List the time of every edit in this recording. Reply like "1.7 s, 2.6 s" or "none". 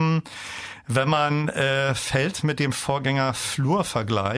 none

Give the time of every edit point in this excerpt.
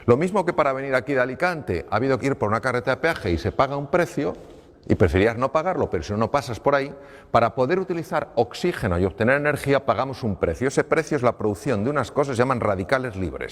2.2 s

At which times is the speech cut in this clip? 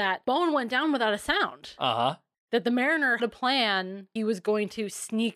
3.2 s, 4.2 s

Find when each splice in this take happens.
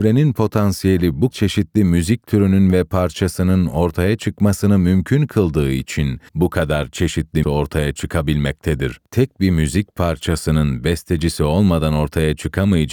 1.3 s, 6.3 s, 7.4 s, 9.1 s

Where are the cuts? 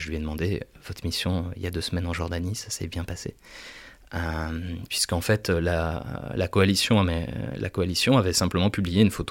none

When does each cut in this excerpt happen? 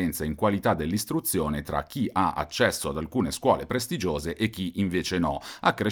none

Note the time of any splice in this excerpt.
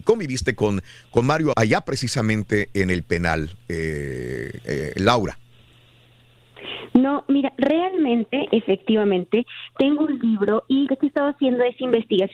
1.5 s, 10.9 s

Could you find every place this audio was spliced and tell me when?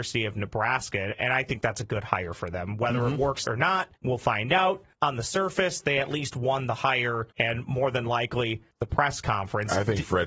3.4 s, 4.0 s, 4.9 s, 7.3 s, 8.7 s

